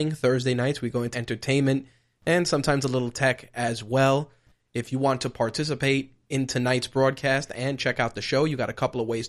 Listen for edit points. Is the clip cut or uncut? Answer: cut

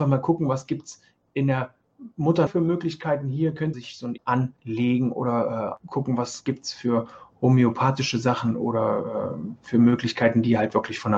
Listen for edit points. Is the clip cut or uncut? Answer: cut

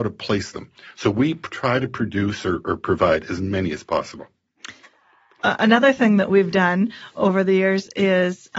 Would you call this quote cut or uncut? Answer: uncut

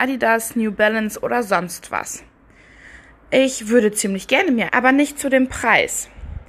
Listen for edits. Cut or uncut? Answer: cut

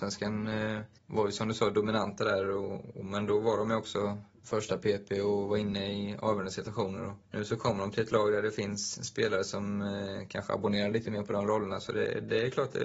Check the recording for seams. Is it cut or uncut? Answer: cut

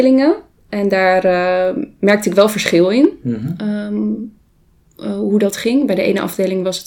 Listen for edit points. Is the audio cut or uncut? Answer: uncut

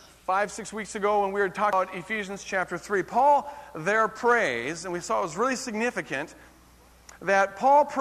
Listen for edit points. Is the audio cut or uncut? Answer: uncut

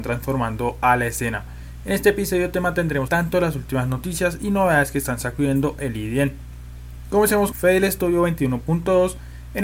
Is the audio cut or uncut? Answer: cut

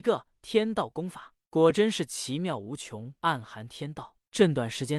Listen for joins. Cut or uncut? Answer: cut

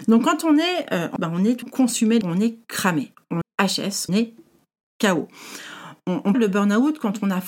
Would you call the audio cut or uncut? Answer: cut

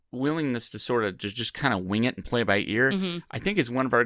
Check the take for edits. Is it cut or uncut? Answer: uncut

